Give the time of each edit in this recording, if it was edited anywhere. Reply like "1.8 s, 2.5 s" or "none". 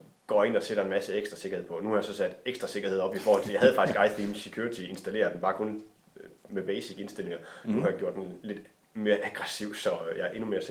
none